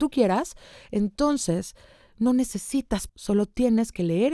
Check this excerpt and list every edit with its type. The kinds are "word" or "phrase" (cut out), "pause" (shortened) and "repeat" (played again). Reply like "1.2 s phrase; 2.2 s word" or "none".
3.1 s word